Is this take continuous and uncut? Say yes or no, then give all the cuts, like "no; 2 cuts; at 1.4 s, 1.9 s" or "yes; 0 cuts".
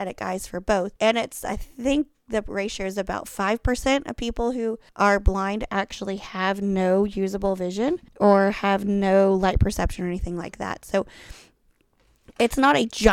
no; 3 cuts; at 1.0 s, 4.9 s, 8.1 s